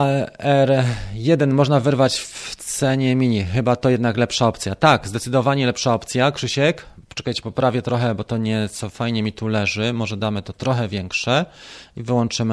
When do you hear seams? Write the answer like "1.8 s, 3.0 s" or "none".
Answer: none